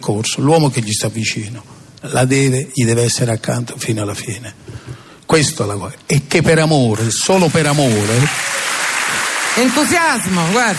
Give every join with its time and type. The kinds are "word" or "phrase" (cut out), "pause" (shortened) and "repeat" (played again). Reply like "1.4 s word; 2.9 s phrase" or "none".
none